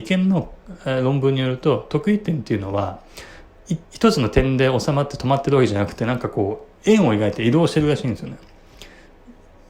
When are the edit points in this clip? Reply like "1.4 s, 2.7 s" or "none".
3.8 s